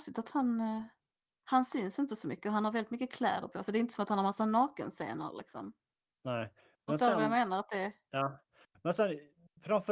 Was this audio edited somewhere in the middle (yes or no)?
no